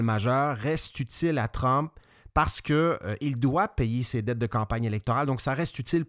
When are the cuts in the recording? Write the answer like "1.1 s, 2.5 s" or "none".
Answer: none

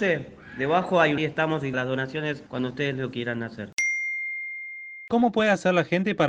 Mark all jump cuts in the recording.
1.2 s, 1.7 s, 2.5 s

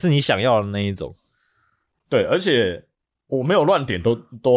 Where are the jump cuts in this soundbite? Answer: none

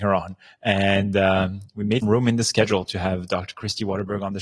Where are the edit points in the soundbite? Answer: 1.7 s, 2.0 s

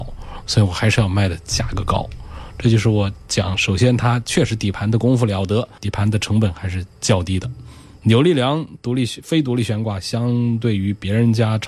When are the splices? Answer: 5.8 s, 7.0 s

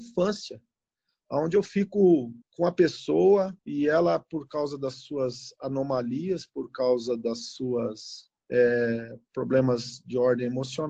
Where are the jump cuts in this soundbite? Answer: 2.4 s, 3.6 s, 8.4 s

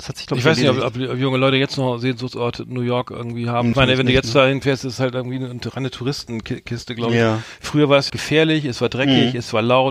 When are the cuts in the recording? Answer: 3.7 s, 8.1 s

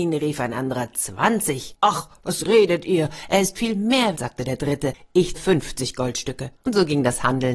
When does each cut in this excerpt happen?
4.1 s, 5.3 s, 6.6 s

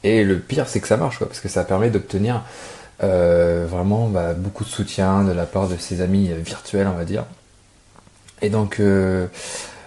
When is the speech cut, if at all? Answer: none

